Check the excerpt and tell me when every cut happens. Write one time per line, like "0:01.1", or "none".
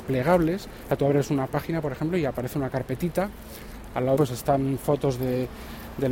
0:04.2

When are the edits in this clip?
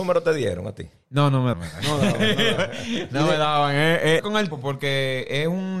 0:01.5
0:02.6
0:04.2
0:04.5

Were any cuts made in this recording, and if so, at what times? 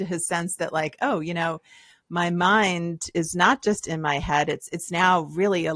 none

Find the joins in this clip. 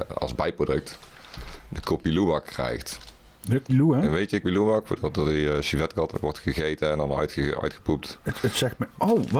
0:03.7
0:04.4
0:06.1

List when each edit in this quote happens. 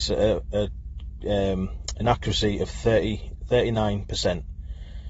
none

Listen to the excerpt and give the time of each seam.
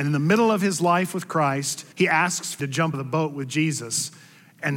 0:01.9
0:02.6
0:02.9

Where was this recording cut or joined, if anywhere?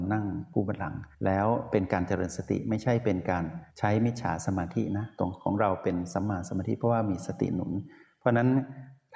0:01.1
0:03.7

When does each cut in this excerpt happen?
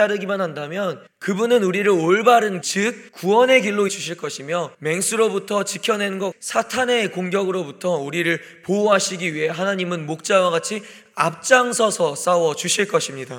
0:01.1
0:02.6
0:03.1
0:03.9
0:04.7
0:06.3

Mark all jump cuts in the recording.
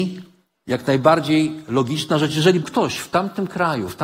0:02.6

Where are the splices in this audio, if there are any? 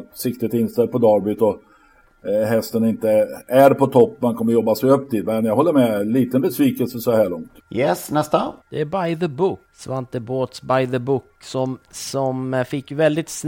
0:07.6
0:08.6
0:09.7

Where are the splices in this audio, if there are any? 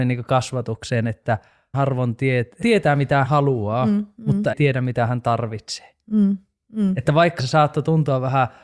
0:01.7
0:02.6
0:03.2
0:04.5
0:07.4

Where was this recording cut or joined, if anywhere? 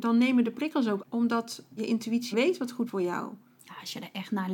0:01.0
0:01.8
0:02.3
0:02.9

